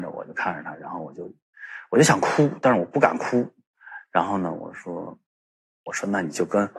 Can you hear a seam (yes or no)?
no